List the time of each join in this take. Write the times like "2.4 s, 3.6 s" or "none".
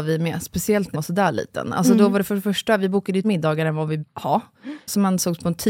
0.9 s, 3.2 s, 4.0 s